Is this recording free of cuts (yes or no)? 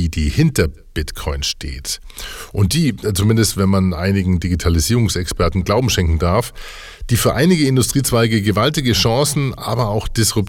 yes